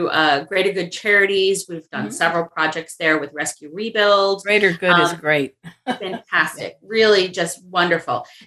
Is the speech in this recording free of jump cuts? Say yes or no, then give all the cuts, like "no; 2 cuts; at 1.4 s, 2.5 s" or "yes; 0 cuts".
yes; 0 cuts